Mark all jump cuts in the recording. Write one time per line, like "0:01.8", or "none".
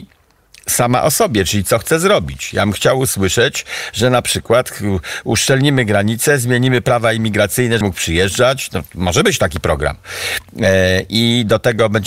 0:07.8